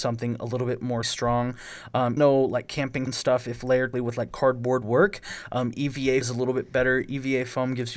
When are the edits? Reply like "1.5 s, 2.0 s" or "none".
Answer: 1.0 s, 2.2 s, 3.1 s, 3.9 s, 4.8 s, 6.2 s